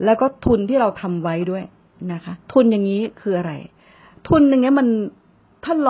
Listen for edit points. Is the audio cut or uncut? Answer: cut